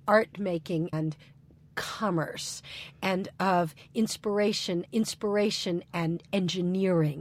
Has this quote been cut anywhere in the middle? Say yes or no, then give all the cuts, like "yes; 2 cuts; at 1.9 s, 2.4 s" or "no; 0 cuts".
yes; 2 cuts; at 0.9 s, 4.9 s